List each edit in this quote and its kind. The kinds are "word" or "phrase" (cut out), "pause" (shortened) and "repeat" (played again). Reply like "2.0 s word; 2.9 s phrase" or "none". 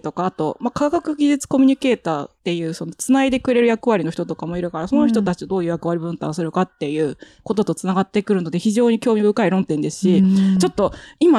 2.4 s pause